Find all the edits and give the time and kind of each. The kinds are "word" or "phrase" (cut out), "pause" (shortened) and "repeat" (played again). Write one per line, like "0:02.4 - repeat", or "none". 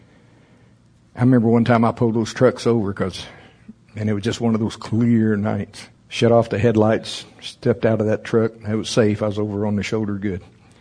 0:06.0 - pause